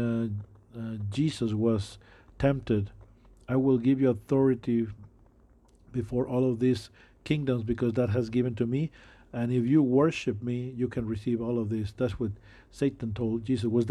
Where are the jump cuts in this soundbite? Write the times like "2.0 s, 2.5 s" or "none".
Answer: none

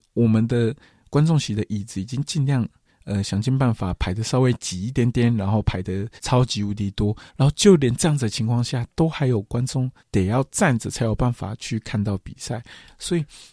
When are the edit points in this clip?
6.2 s, 7.3 s, 10.0 s

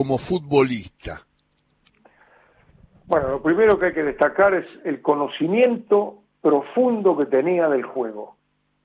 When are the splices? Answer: none

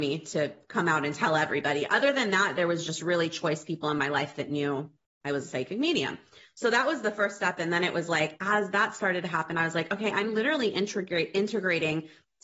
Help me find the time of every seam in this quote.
none

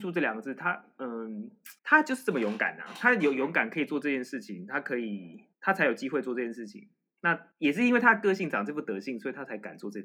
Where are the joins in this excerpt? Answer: 1.8 s, 5.5 s, 7.5 s

